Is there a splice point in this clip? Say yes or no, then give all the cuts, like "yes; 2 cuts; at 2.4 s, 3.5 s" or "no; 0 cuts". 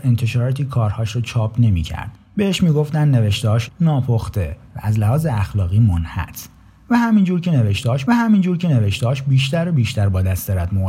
yes; 4 cuts; at 2.2 s, 3.7 s, 4.7 s, 8.1 s